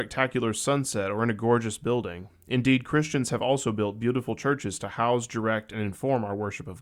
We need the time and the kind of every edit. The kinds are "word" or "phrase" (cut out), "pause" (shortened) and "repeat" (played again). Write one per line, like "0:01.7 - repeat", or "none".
none

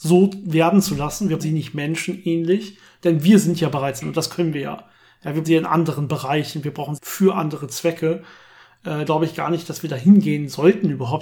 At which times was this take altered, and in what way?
0:01.4 - word
0:04.0 - word
0:05.4 - word
0:07.0 - word
0:09.1 - word

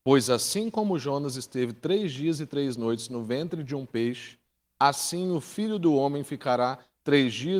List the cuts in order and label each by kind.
none

